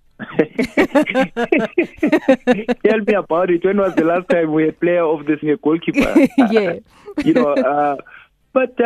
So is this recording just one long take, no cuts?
no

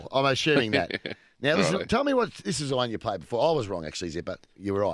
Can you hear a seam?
no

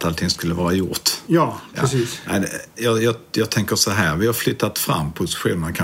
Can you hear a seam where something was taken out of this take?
no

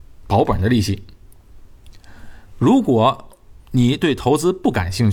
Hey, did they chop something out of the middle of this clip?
yes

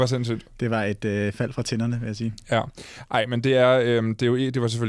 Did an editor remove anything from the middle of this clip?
no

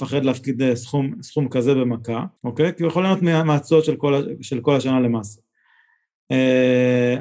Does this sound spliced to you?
yes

